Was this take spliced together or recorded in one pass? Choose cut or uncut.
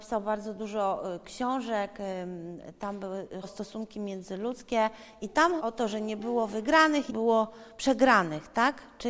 cut